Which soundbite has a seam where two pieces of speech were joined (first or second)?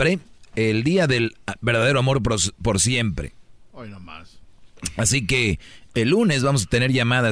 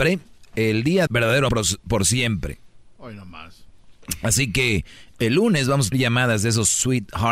second